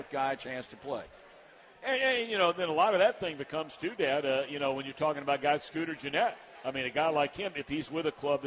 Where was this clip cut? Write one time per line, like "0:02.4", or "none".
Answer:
0:05.6